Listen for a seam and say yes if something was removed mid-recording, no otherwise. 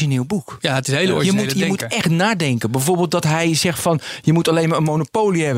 no